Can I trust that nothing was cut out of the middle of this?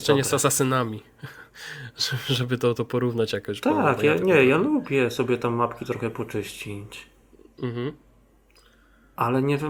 yes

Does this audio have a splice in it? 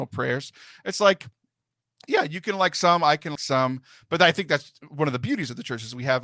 yes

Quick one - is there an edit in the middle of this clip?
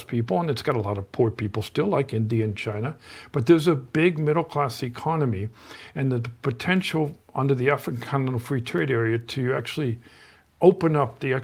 no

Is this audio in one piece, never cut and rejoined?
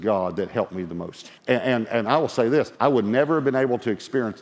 no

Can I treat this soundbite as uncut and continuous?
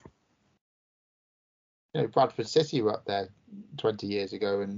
yes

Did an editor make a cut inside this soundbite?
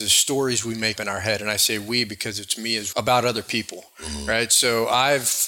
yes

